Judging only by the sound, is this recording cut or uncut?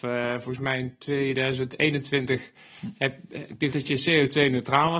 cut